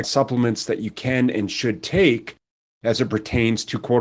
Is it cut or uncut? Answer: uncut